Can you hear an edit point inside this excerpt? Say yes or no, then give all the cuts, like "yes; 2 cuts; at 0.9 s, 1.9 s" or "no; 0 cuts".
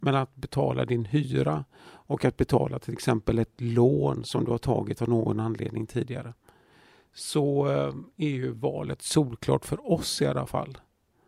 no; 0 cuts